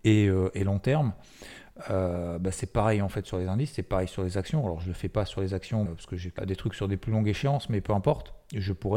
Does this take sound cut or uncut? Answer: cut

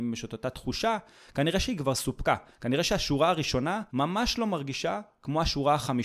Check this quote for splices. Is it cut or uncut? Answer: cut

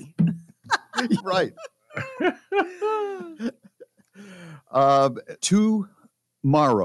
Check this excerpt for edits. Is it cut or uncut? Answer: cut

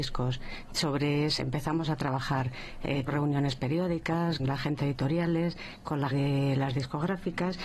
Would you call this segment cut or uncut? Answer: cut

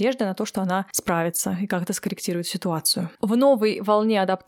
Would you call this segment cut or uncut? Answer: cut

